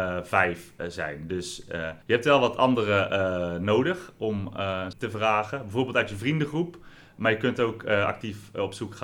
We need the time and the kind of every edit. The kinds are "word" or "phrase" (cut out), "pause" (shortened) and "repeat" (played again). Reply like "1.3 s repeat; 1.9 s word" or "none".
2.0 s pause; 4.9 s phrase